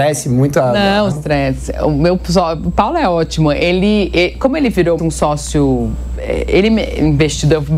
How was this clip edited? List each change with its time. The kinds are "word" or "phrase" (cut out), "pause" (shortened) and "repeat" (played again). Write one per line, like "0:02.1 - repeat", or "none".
0:01.1 - word
0:05.0 - word